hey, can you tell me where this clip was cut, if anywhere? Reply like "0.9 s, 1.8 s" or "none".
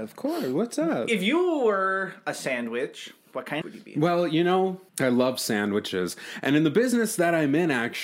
3.2 s, 3.6 s, 4.9 s